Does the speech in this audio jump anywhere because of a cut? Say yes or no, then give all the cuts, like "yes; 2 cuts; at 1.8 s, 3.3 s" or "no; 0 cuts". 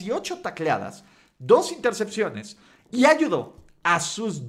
no; 0 cuts